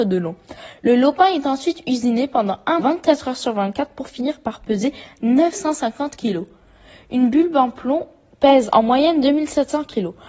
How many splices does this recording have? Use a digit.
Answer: 1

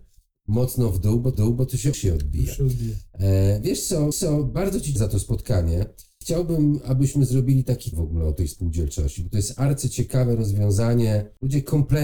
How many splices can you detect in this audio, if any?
5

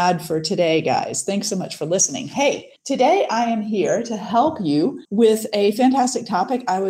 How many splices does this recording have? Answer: 2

